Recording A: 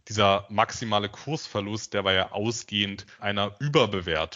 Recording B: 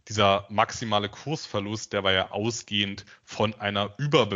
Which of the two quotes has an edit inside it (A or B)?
A